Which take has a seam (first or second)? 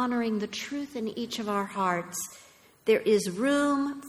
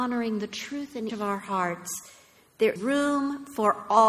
second